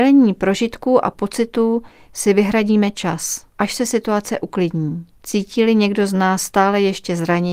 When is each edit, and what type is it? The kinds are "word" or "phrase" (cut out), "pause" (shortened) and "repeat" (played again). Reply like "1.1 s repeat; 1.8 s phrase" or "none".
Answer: 3.5 s pause; 5.2 s pause